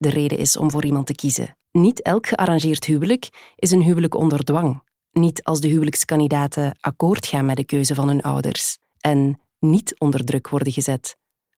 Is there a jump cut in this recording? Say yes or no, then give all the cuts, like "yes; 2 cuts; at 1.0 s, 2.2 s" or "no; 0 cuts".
yes; 2 cuts; at 1.6 s, 4.9 s